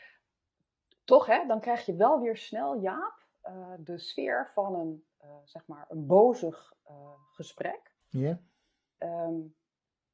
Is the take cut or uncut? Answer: cut